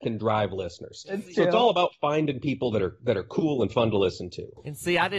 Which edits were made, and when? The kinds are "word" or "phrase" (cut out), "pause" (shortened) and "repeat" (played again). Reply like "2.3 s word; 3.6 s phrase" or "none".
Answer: none